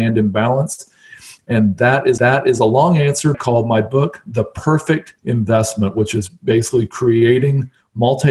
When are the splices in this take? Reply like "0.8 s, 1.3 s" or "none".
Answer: 2.2 s, 3.3 s, 5.2 s